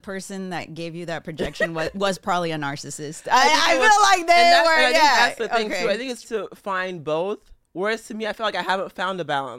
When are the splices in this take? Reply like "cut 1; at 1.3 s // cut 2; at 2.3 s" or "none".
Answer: cut 1; at 6.2 s